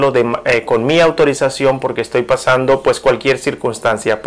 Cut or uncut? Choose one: uncut